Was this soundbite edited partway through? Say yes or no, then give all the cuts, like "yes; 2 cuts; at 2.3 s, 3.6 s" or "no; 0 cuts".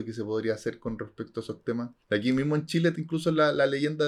yes; 2 cuts; at 2.0 s, 2.9 s